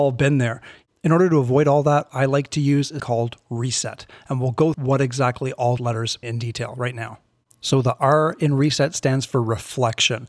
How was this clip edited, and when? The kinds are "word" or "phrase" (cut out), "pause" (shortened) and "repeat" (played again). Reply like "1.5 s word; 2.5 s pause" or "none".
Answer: 2.1 s word; 3.0 s word; 4.7 s word; 5.8 s word; 6.2 s word

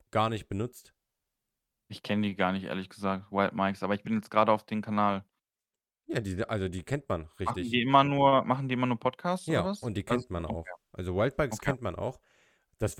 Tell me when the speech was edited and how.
none

